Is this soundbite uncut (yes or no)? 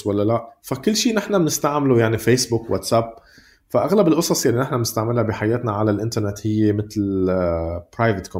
yes